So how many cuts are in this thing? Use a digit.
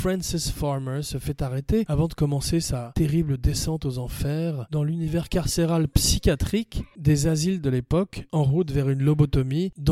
0